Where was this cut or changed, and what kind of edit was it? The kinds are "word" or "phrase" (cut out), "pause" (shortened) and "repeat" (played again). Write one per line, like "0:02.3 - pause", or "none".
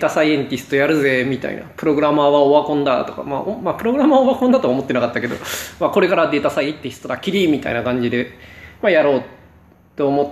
none

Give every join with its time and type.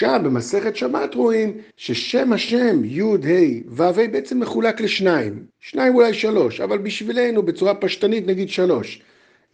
0:01.7 - pause
0:05.5 - pause

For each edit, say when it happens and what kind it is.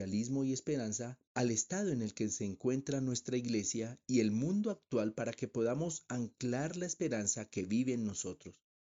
0:01.3 - pause

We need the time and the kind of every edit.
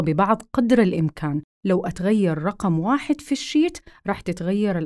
none

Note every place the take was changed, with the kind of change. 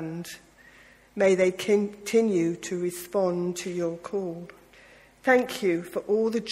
0:04.7 - pause

